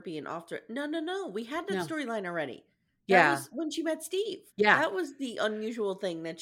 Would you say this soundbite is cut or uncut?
cut